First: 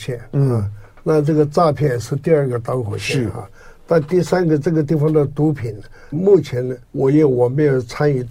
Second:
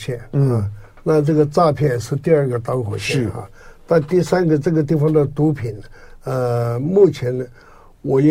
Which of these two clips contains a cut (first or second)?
first